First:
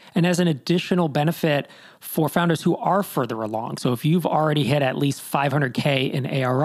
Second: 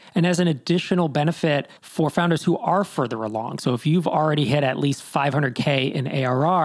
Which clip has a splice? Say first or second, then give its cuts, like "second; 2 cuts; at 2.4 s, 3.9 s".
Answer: second; 1 cut; at 1.8 s